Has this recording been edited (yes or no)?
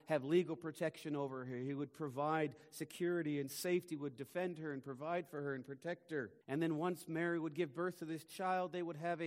yes